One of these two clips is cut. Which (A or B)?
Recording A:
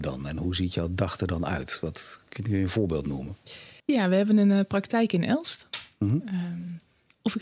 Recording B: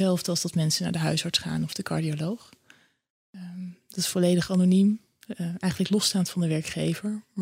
A